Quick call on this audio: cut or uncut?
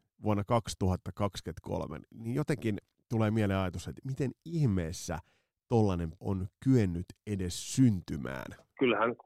cut